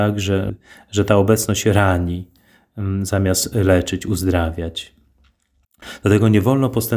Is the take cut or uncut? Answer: uncut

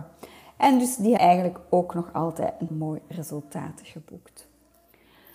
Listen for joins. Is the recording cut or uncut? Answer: cut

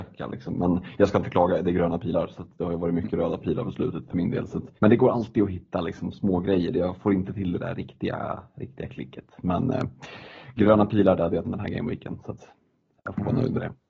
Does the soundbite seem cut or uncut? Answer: cut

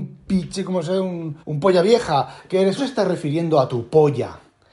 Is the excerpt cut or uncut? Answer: cut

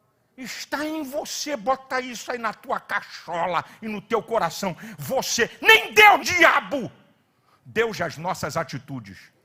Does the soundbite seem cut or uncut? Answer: cut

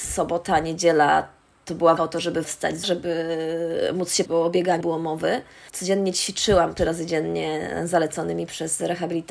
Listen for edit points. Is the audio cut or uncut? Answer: cut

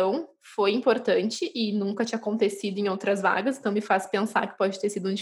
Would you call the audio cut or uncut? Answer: uncut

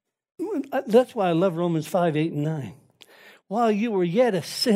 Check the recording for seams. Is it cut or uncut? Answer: uncut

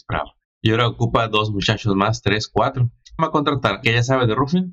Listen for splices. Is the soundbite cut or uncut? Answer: cut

